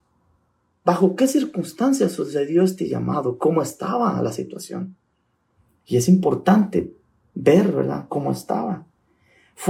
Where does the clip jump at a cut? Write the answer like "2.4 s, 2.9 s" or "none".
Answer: none